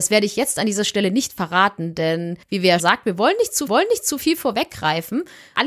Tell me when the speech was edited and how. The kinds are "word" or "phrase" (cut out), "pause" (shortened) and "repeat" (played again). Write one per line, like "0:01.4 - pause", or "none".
0:02.4 - pause
0:02.8 - word
0:03.7 - repeat

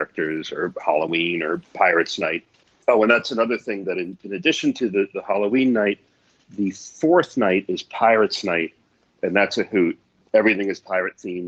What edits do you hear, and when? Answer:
none

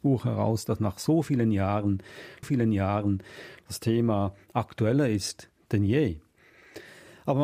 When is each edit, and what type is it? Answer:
0:02.4 - repeat

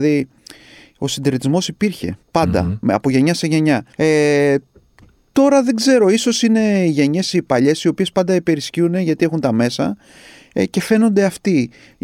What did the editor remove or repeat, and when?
0:02.2 - pause
0:03.9 - pause

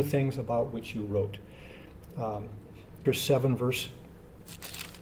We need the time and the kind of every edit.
0:03.1 - word

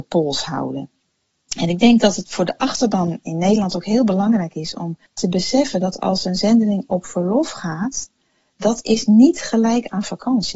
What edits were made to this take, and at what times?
0:05.1 - pause

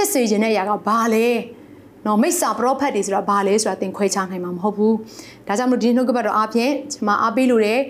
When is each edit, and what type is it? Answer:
none

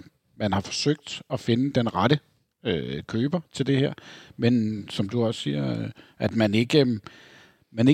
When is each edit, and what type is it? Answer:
none

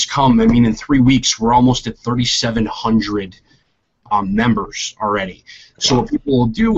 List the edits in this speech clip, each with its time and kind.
none

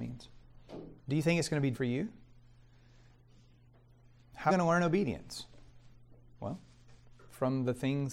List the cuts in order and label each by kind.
0:01.0 - pause
0:01.7 - word
0:04.5 - phrase

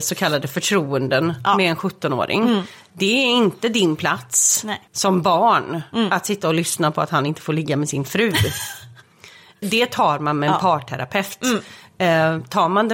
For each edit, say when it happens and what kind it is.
0:04.9 - pause
0:09.6 - word

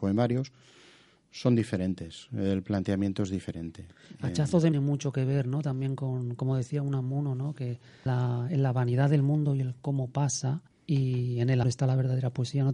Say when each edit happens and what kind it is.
0:04.7 - phrase
0:08.1 - word
0:10.7 - pause
0:11.6 - word

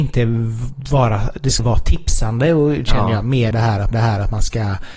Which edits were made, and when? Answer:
0:01.6 - word
0:03.5 - word
0:03.9 - repeat

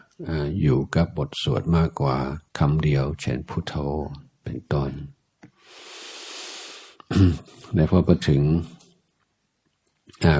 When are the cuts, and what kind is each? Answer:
0:02.5 - pause
0:07.5 - pause

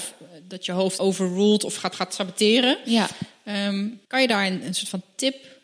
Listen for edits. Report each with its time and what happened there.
0:01.0 - phrase
0:01.9 - repeat
0:04.0 - pause

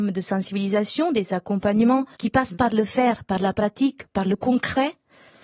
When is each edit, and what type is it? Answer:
0:02.1 - pause
0:02.5 - word

